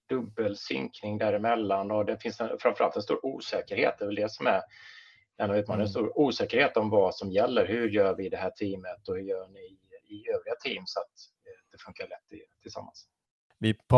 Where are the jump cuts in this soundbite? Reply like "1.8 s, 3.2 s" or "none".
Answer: none